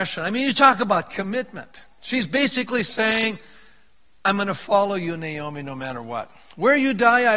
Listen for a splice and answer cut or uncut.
uncut